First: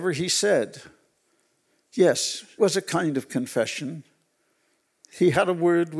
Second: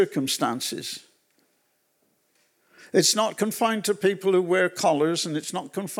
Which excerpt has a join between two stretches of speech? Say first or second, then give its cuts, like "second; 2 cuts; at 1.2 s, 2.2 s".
first; 1 cut; at 2.6 s